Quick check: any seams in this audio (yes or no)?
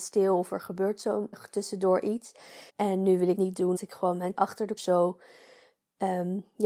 yes